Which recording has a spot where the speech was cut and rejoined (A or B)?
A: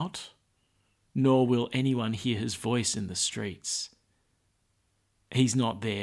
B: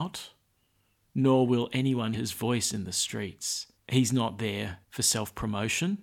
B